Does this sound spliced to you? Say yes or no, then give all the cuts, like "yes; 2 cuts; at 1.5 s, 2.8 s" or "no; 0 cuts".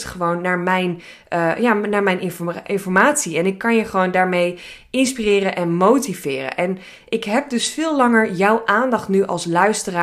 no; 0 cuts